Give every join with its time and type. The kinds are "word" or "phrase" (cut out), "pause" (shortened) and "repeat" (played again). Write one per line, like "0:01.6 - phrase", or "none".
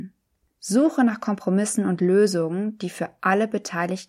none